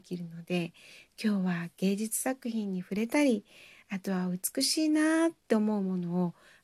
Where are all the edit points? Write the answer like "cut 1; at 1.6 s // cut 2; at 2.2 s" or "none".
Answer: none